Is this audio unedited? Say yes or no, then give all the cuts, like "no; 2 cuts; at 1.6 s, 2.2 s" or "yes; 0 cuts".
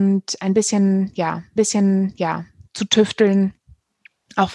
no; 1 cut; at 1.6 s